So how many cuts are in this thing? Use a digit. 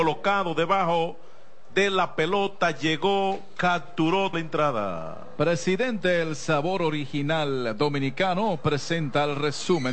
1